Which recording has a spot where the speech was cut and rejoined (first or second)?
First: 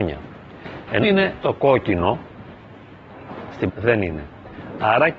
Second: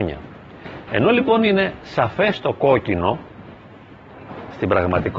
first